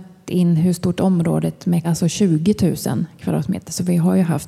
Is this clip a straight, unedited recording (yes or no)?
no